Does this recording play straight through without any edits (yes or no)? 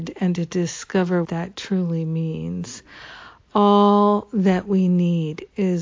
no